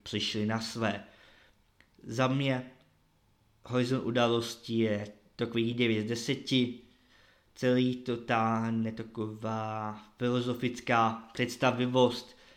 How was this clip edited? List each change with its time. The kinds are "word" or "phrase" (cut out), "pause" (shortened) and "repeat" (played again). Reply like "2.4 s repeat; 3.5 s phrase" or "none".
none